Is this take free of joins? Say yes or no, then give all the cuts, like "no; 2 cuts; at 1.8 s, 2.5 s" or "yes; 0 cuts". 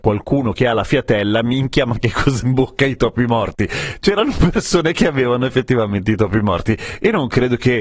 no; 1 cut; at 2.4 s